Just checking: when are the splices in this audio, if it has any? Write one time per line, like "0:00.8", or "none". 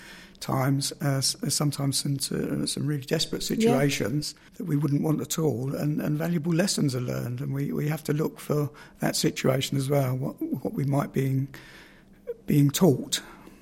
0:04.5